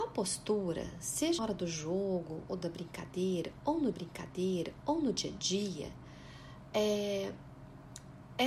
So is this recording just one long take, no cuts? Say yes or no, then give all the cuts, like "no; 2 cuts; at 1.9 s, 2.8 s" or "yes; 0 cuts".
no; 2 cuts; at 1.4 s, 3.9 s